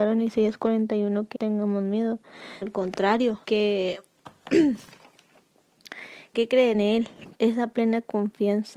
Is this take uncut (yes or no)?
no